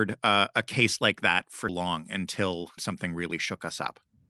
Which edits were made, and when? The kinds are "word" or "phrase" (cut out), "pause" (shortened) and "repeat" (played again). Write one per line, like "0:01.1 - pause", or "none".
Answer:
0:01.7 - word
0:02.8 - word